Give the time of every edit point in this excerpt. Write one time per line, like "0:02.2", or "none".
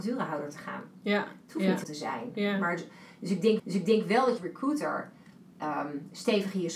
0:01.8
0:03.6
0:04.4